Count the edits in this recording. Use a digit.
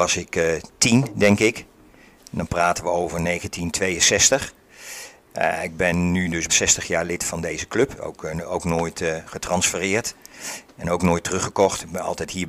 1